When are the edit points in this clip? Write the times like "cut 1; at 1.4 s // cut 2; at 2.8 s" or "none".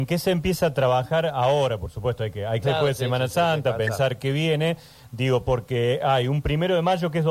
cut 1; at 2.6 s

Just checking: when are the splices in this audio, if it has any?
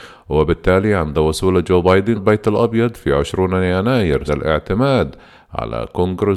cut 1; at 2.2 s // cut 2; at 4.3 s

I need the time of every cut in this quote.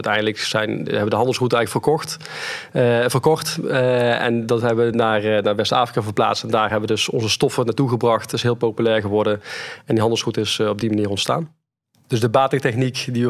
none

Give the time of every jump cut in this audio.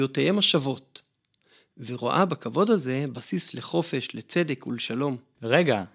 none

